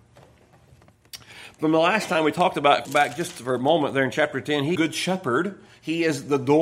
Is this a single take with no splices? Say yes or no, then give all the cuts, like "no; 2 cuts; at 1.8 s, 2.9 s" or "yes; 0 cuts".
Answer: no; 2 cuts; at 2.8 s, 4.7 s